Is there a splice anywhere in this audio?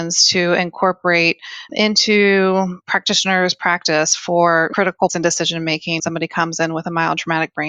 yes; 2 cuts; at 5.1 s, 6.0 s

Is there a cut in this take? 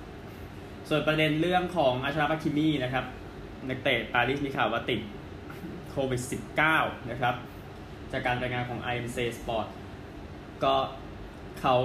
no; 0 cuts

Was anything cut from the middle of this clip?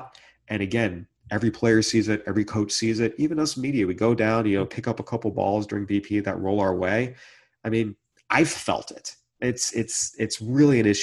no; 0 cuts

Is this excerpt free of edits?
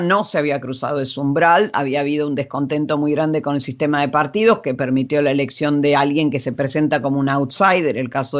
yes; 0 cuts

